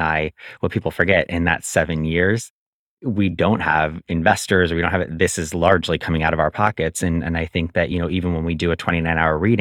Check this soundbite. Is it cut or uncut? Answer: uncut